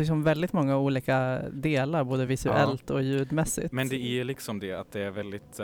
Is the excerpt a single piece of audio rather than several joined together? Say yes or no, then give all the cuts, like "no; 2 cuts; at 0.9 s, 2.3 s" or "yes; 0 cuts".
yes; 0 cuts